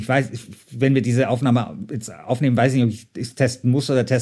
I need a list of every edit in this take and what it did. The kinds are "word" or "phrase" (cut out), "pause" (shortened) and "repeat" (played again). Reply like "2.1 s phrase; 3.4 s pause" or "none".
none